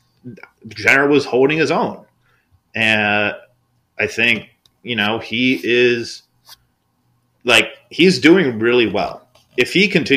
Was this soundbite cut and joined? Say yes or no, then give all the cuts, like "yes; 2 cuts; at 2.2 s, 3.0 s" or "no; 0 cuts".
no; 0 cuts